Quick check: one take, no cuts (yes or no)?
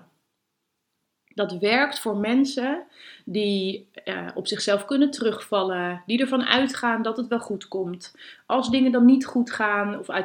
yes